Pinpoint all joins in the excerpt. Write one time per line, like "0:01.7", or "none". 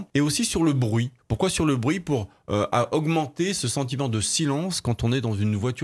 none